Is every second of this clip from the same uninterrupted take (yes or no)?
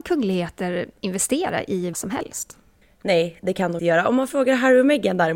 no